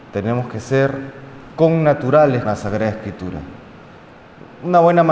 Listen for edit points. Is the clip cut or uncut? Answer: cut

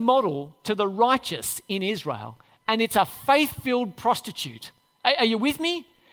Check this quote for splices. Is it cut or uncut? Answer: uncut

